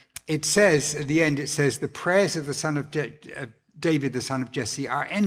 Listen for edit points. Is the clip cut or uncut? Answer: uncut